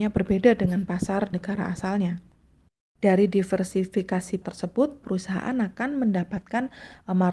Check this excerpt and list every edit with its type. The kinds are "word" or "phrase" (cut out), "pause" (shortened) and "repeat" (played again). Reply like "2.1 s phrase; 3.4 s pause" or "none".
1.3 s word; 4.4 s word; 5.0 s word